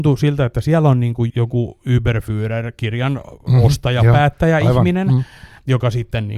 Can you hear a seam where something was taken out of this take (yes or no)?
yes